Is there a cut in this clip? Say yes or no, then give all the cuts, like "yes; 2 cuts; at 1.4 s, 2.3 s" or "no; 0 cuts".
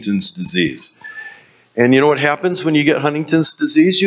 no; 0 cuts